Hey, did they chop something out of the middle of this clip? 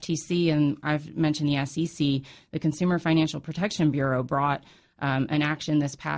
no; 0 cuts

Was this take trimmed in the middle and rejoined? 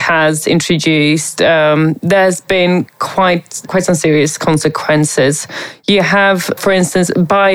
yes; 1 cut; at 3.7 s

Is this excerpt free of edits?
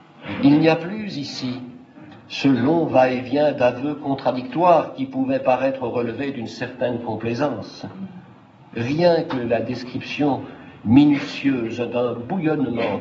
yes; 0 cuts

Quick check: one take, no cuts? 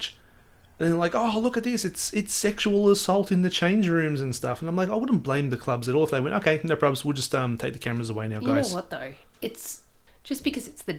yes; 0 cuts

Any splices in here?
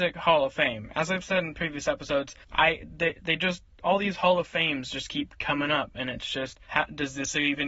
yes; 2 cuts; at 2.4 s, 6.6 s

